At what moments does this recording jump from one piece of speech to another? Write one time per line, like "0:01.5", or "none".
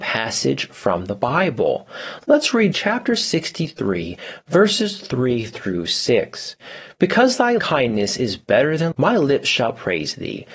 0:02.7
0:07.6
0:08.9